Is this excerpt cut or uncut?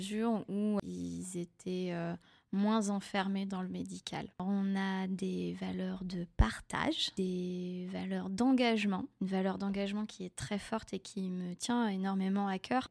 uncut